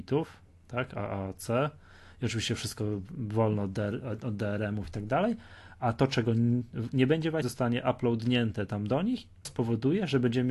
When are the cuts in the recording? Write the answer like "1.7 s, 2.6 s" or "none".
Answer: 7.4 s, 9.4 s